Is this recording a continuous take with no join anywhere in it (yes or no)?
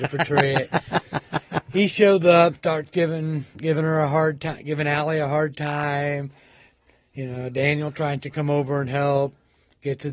yes